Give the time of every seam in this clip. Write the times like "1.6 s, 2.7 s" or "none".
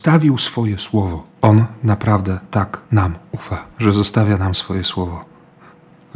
1.3 s, 3.7 s